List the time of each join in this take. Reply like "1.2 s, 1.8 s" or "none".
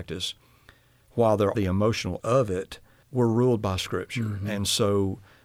1.5 s, 2.2 s, 3.0 s